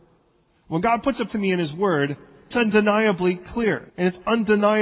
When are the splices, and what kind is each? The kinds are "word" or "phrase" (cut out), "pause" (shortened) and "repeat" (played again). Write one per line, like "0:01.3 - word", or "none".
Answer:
0:01.3 - word
0:02.5 - word
0:03.9 - pause